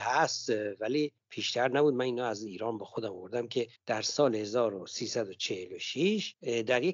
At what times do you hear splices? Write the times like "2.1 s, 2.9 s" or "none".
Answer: 3.7 s